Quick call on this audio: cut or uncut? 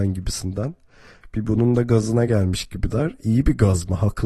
uncut